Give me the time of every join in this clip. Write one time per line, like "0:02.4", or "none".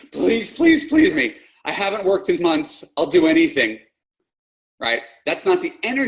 0:01.1
0:02.4